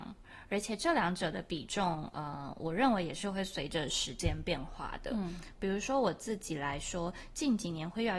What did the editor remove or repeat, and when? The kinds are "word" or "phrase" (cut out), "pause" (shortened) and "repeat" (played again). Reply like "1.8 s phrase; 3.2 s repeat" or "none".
none